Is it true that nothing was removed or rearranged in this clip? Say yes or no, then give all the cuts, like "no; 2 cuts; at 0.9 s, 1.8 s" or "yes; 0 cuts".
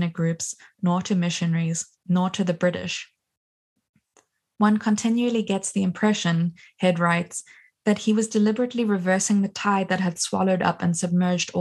yes; 0 cuts